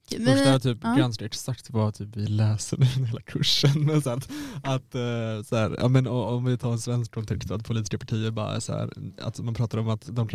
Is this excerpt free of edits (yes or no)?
yes